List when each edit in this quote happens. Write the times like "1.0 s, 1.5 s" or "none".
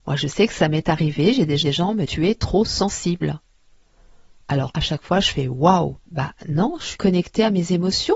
1.6 s, 2.1 s, 4.7 s, 6.0 s, 7.0 s